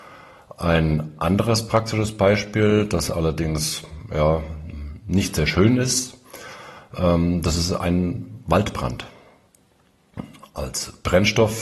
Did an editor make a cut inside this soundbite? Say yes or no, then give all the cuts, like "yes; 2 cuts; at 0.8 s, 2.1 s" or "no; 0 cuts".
no; 0 cuts